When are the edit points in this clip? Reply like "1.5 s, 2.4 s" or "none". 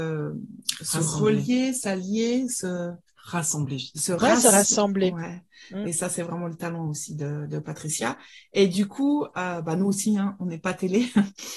none